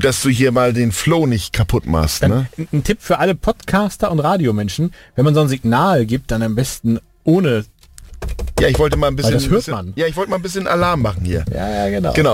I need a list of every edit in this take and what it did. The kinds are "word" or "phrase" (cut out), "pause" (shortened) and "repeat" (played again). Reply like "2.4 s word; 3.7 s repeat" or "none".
none